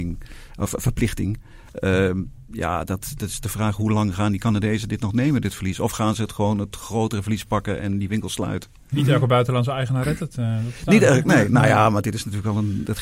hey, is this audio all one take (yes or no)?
yes